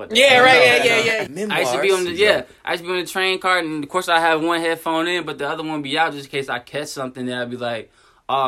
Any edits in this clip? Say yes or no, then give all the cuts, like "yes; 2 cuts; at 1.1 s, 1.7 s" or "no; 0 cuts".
yes; 1 cut; at 1.3 s